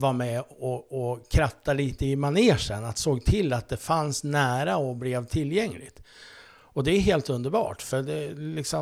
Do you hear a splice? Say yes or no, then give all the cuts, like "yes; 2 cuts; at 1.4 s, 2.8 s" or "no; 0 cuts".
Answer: no; 0 cuts